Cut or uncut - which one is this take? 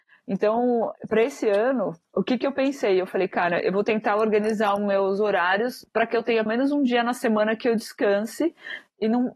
cut